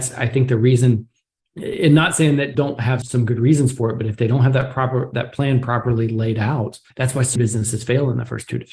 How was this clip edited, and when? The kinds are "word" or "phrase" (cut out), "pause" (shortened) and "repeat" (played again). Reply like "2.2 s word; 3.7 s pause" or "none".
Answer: 1.4 s pause; 2.5 s word; 3.0 s word; 6.9 s pause; 7.4 s word